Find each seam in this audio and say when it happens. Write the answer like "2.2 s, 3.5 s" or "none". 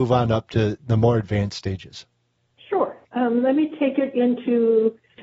3.0 s